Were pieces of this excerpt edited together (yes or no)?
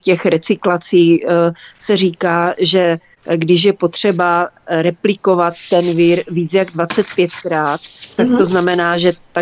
no